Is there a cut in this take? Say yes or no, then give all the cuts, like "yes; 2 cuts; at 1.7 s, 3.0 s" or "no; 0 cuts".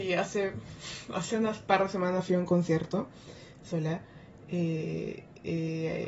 no; 0 cuts